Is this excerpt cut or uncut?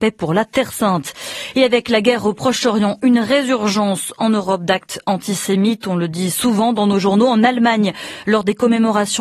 uncut